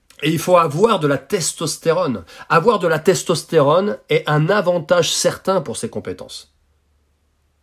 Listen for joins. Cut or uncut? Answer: uncut